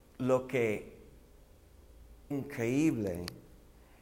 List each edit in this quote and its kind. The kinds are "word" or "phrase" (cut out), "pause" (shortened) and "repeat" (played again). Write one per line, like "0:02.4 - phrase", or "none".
0:02.3 - word